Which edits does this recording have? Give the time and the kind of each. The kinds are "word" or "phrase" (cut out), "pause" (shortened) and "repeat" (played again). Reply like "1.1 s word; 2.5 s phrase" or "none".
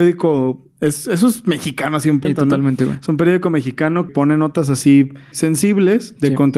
2.2 s word; 4.1 s word; 5.3 s word